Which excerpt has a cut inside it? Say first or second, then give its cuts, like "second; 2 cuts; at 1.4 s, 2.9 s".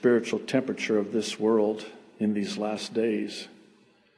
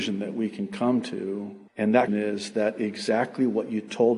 second; 2 cuts; at 1.7 s, 2.1 s